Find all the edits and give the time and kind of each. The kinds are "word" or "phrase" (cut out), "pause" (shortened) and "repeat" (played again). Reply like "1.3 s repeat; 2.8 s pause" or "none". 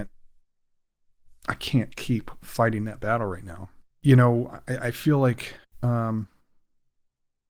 3.9 s pause; 5.6 s pause

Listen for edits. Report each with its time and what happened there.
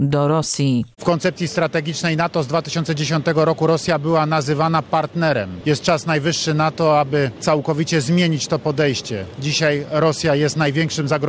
0.9 s pause

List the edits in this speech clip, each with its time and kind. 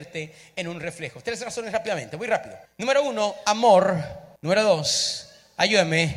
2.7 s pause; 4.4 s pause

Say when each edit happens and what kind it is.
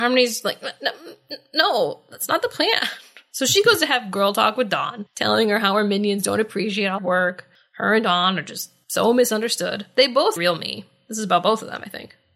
7.0 s phrase; 10.4 s word

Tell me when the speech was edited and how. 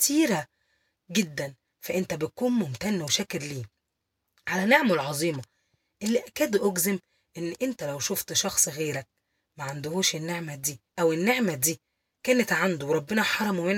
10.9 s pause

